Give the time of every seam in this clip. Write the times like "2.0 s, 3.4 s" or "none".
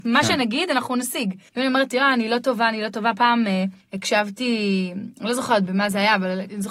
none